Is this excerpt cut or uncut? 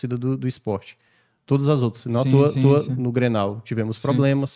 cut